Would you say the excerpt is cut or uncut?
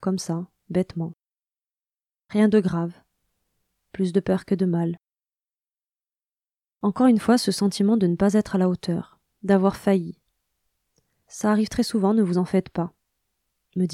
uncut